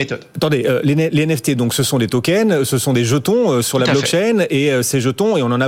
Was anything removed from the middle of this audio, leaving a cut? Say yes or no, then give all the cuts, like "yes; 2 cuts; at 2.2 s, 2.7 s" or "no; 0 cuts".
no; 0 cuts